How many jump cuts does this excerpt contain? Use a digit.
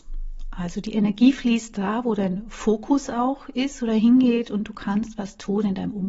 0